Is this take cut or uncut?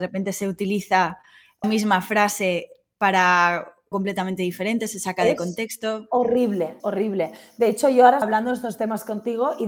cut